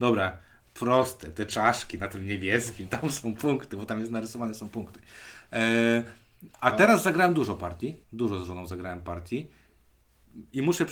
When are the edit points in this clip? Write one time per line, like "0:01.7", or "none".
0:06.5
0:08.0